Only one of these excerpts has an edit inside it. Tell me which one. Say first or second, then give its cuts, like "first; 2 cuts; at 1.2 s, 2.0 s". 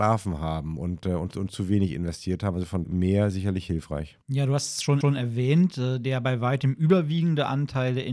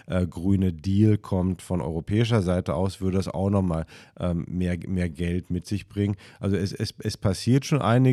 first; 3 cuts; at 2.8 s, 4.2 s, 5.0 s